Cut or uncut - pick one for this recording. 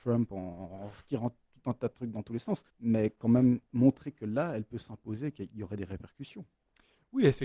cut